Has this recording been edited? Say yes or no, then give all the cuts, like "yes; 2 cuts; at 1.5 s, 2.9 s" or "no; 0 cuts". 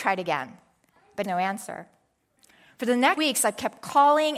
yes; 2 cuts; at 1.2 s, 3.2 s